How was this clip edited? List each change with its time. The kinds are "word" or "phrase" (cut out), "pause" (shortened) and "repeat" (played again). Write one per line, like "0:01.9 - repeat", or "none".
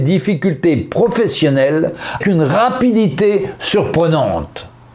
0:02.2 - word